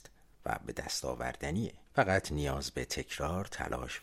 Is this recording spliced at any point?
yes; 1 cut; at 1.9 s

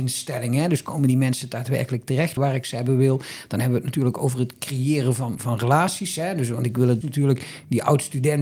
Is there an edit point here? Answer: yes; 3 cuts; at 2.4 s, 5.4 s, 7.0 s

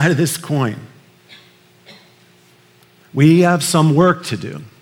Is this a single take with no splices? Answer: yes; 0 cuts

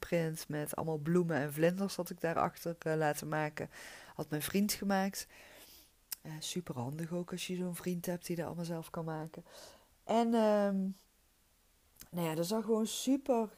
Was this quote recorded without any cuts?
no; 1 cut; at 12.6 s

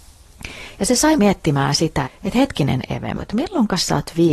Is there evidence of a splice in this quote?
yes; 3 cuts; at 1.2 s, 2.0 s, 3.2 s

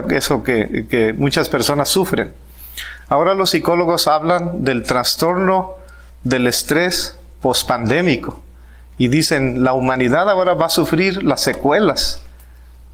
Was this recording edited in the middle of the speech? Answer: no; 0 cuts

